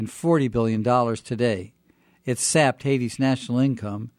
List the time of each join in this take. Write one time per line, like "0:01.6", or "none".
none